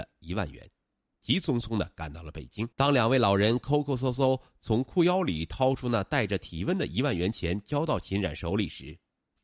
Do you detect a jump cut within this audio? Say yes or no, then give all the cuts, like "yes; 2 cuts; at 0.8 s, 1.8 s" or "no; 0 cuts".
yes; 1 cut; at 2.7 s